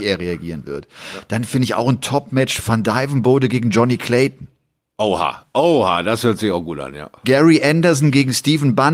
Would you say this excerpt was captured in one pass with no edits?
yes; 0 cuts

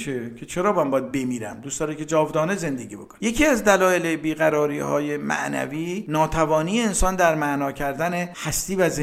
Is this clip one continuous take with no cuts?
yes; 0 cuts

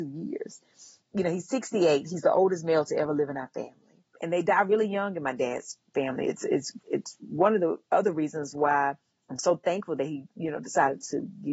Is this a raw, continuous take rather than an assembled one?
yes; 0 cuts

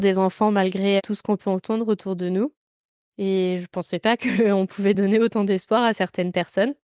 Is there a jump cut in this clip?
no; 0 cuts

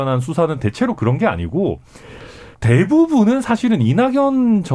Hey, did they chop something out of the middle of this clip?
yes; 1 cut; at 2.5 s

